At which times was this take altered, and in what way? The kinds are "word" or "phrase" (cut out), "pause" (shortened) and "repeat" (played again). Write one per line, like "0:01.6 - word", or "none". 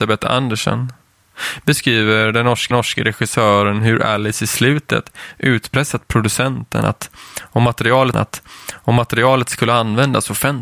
0:02.7 - repeat
0:08.1 - repeat